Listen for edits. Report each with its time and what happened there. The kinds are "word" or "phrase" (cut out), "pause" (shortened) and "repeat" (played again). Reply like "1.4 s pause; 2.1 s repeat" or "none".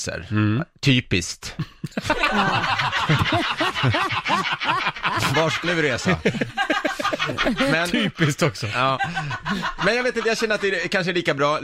5.3 s word; 5.6 s word